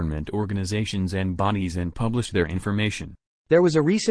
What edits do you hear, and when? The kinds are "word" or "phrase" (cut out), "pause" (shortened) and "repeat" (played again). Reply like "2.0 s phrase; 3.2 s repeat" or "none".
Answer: none